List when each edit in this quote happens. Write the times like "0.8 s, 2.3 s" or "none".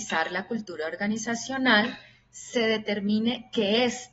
none

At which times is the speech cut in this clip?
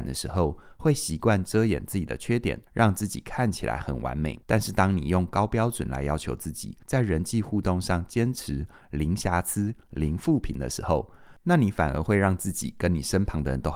2.7 s, 4.4 s, 6.8 s

